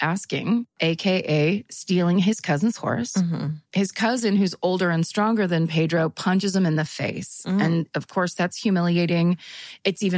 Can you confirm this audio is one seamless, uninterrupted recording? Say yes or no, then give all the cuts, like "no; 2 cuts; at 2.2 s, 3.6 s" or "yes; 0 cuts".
yes; 0 cuts